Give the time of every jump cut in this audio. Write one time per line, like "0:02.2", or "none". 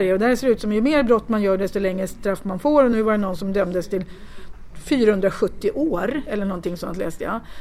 none